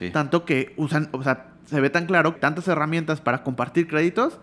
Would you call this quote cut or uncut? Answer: cut